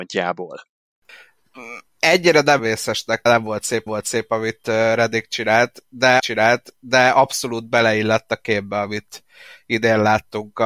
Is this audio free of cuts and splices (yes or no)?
no